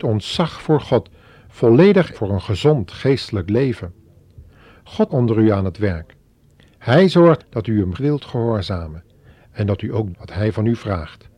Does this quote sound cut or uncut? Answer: cut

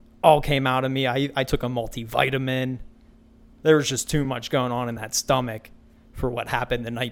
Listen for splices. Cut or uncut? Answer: uncut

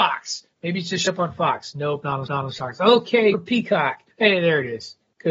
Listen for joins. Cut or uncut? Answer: cut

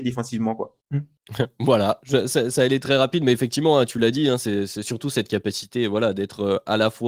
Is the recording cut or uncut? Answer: uncut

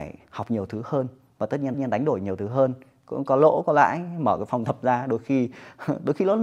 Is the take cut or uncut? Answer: cut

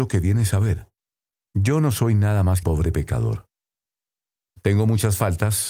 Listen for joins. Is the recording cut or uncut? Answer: cut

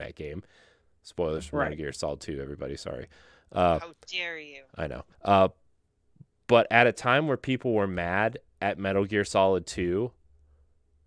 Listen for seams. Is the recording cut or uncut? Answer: cut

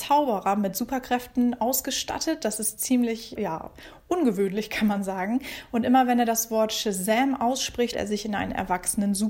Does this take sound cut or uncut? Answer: cut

